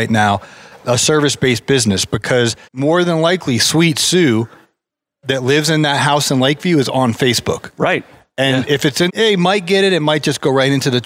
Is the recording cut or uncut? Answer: cut